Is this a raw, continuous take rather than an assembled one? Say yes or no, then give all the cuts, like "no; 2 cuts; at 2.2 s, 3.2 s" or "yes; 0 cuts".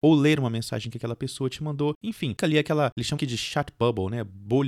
no; 2 cuts; at 2.4 s, 3.2 s